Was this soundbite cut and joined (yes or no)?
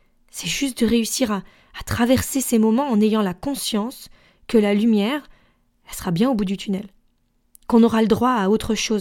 no